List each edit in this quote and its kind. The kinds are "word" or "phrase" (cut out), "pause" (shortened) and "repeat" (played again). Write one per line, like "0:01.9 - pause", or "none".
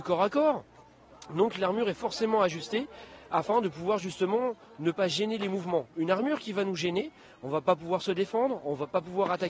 none